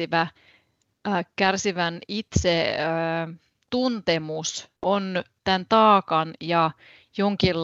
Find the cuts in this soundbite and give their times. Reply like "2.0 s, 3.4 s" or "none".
4.8 s